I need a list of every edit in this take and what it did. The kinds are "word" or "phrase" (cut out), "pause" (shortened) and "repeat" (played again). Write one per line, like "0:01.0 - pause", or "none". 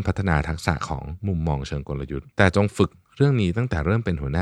0:02.3 - pause